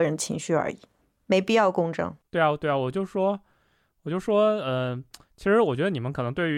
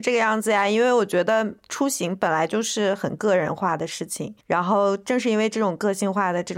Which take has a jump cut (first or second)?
second